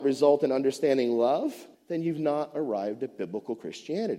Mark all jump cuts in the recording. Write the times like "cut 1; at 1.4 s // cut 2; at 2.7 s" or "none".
cut 1; at 1.7 s